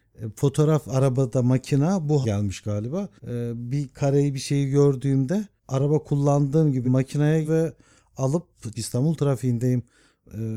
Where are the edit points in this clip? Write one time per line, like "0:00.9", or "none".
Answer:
0:02.2
0:03.2
0:05.6
0:06.8
0:07.4
0:08.7